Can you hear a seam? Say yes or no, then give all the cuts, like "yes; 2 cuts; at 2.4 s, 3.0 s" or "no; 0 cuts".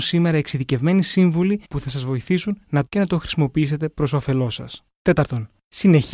yes; 2 cuts; at 1.6 s, 2.9 s